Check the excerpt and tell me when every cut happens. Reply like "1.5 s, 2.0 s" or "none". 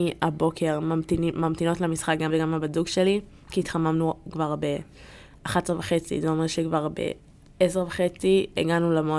2.3 s